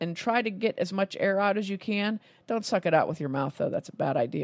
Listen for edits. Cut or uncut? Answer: uncut